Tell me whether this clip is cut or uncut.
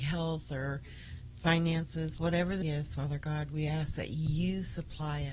cut